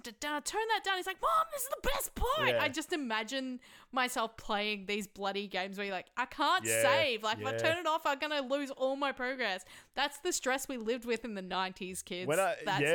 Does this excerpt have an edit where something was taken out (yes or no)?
no